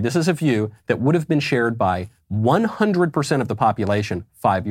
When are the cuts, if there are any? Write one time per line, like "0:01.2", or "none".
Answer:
none